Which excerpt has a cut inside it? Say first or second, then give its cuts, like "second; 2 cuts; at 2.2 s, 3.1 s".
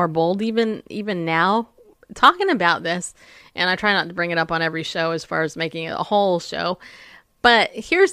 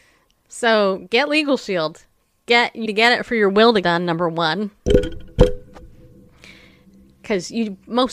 second; 2 cuts; at 2.9 s, 3.8 s